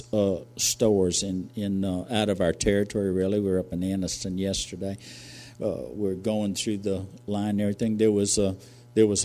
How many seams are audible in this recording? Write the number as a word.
zero